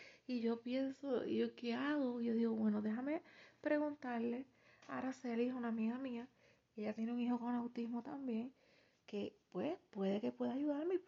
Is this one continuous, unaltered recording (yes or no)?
yes